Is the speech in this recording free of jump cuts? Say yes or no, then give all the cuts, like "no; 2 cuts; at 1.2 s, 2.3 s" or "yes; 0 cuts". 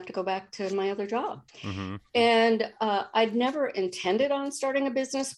no; 1 cut; at 1.5 s